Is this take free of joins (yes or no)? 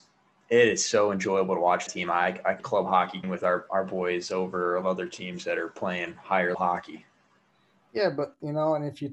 no